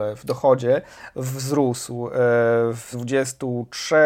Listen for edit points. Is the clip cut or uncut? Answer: cut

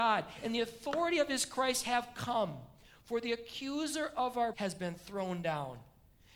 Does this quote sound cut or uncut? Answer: cut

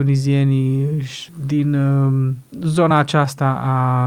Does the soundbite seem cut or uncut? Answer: uncut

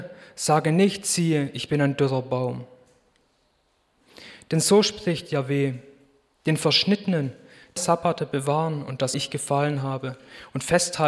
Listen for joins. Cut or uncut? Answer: cut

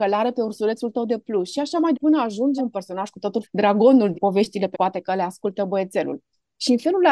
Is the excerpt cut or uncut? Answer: cut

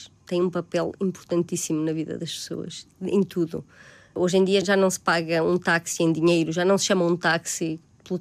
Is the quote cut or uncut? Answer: uncut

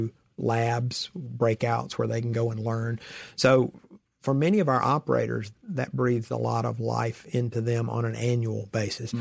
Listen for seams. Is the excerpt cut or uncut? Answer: uncut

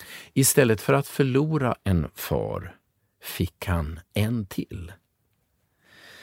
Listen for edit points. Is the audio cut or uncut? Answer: uncut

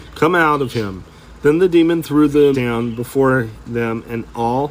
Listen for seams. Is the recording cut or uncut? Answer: cut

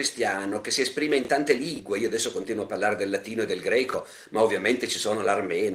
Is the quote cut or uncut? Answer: uncut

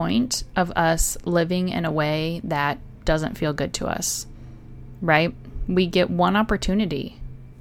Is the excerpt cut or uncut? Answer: uncut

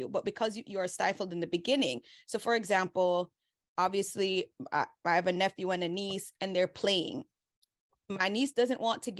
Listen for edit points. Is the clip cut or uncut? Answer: uncut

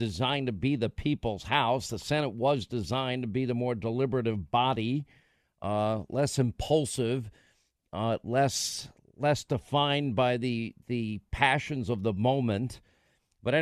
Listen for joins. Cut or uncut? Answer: uncut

